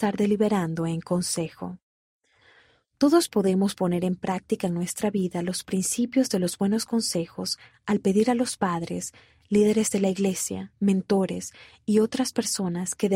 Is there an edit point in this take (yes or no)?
no